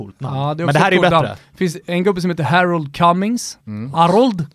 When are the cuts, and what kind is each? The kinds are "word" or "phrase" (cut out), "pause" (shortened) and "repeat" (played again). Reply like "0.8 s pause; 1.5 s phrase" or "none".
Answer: 3.6 s pause